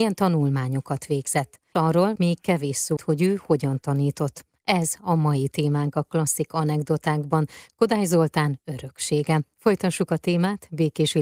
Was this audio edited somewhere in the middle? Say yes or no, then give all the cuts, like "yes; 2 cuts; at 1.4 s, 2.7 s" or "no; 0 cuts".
yes; 2 cuts; at 2.2 s, 3.0 s